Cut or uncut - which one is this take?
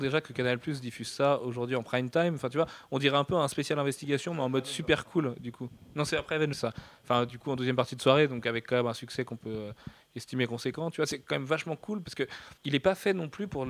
cut